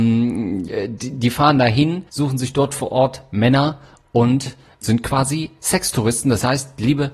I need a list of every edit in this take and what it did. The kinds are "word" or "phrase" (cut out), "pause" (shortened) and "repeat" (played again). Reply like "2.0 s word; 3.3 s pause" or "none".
2.1 s pause; 4.8 s word